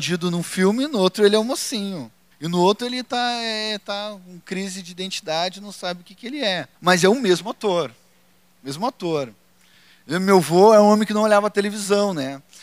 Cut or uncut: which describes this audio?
cut